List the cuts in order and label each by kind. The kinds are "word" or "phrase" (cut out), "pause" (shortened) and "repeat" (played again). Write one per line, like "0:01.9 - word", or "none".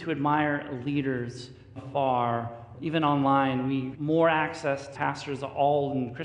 0:01.8 - word
0:02.7 - word
0:03.9 - word
0:04.9 - word